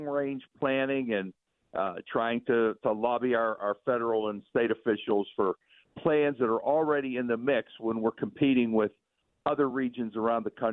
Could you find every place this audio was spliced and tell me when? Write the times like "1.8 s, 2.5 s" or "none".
none